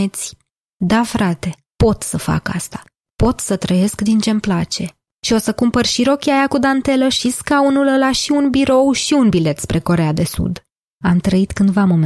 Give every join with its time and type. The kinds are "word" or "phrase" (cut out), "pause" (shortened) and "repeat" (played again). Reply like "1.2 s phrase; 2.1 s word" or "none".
none